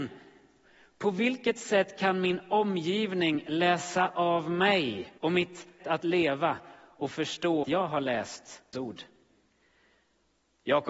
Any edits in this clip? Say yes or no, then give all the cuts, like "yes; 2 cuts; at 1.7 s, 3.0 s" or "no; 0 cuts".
yes; 4 cuts; at 5.2 s, 5.8 s, 7.6 s, 8.7 s